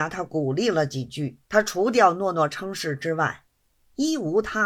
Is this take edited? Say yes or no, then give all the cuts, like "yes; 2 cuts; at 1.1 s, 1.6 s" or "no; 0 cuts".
yes; 1 cut; at 1.4 s